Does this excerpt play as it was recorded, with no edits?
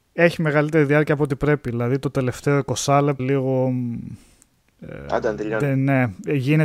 no; 1 cut; at 3.2 s

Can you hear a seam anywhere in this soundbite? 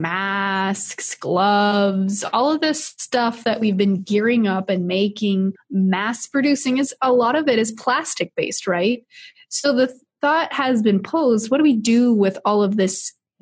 yes; 1 cut; at 5.6 s

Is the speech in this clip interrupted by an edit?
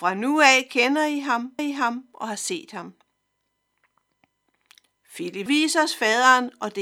yes; 2 cuts; at 1.6 s, 5.5 s

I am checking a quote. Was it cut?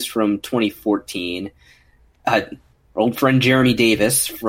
yes; 1 cut; at 2.7 s

